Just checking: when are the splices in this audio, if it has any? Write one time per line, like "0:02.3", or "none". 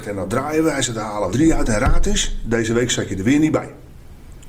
0:01.3

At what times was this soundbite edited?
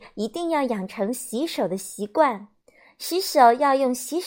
none

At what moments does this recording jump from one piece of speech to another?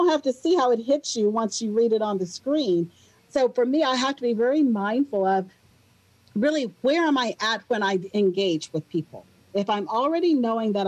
none

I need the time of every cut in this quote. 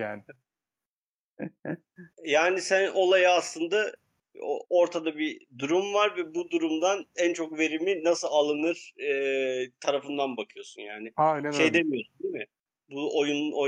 0:02.1

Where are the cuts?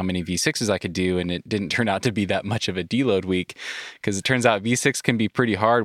none

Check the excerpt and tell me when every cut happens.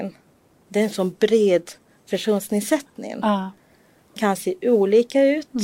0:04.2

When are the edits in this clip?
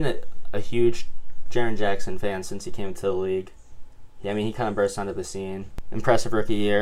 none

